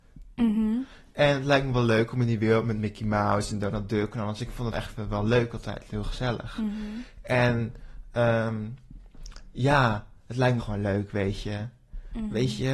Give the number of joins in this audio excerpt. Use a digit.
2